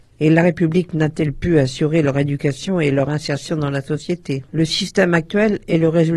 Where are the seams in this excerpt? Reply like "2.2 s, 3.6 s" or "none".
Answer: 4.5 s